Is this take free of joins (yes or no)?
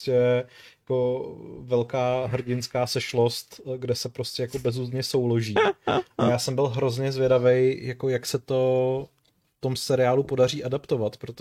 yes